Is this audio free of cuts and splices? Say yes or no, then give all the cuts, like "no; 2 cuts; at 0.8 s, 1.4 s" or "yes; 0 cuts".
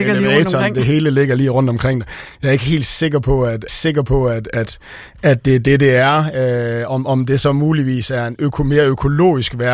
no; 1 cut; at 3.7 s